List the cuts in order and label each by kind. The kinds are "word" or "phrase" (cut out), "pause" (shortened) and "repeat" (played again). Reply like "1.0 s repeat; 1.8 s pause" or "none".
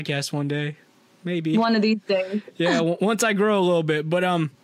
none